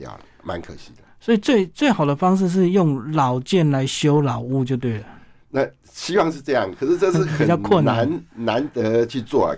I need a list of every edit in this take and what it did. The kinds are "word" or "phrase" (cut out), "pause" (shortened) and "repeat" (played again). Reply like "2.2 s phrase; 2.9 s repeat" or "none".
none

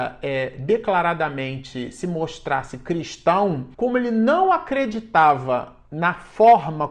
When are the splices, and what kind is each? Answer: 3.7 s pause

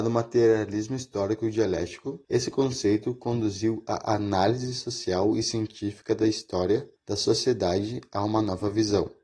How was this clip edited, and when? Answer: 2.2 s pause; 7.0 s pause

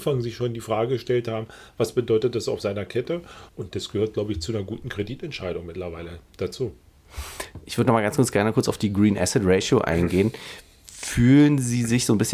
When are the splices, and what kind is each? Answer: 3.5 s pause

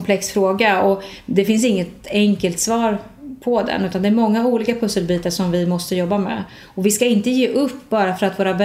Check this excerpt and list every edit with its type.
none

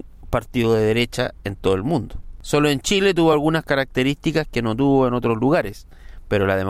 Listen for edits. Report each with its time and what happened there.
none

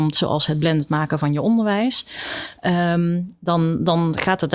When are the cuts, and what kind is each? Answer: none

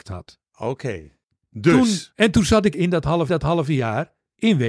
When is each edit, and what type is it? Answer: 1.2 s pause; 2.7 s word; 3.3 s repeat

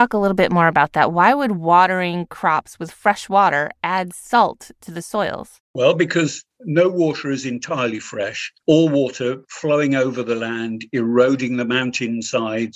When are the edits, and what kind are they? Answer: 5.6 s pause; 8.6 s pause

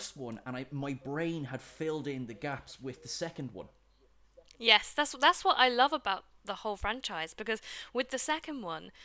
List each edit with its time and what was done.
none

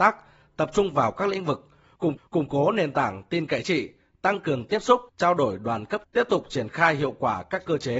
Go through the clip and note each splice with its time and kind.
2.2 s repeat; 3.6 s word; 5.1 s pause; 6.0 s word

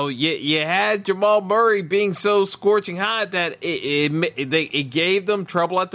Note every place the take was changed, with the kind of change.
none

